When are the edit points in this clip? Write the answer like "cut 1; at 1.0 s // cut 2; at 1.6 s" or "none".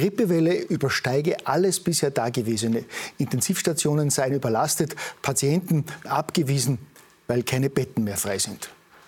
cut 1; at 6.1 s